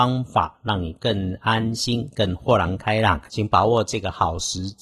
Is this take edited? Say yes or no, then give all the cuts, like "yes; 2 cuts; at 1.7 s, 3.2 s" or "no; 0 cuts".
yes; 1 cut; at 3.3 s